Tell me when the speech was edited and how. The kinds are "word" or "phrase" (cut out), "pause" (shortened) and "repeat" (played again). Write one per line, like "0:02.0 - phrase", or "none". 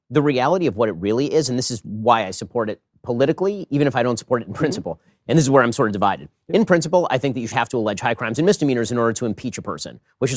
0:07.5 - word